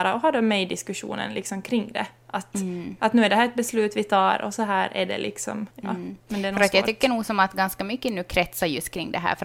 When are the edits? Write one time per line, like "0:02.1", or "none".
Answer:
0:05.7
0:06.2